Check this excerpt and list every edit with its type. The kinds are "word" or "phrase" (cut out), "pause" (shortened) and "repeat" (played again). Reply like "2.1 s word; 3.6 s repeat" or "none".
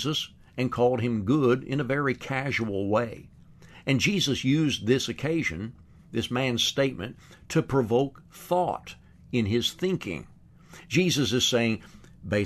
none